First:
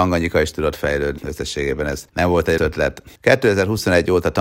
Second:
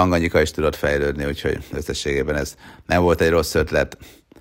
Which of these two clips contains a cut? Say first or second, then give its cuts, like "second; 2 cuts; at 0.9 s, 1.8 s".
first; 4 cuts; at 1.2 s, 2.1 s, 2.6 s, 3.2 s